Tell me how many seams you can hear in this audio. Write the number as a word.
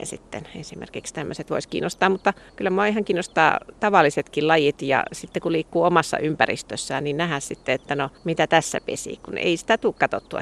two